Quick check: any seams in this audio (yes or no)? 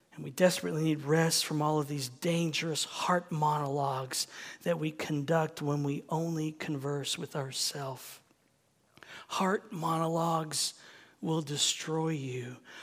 no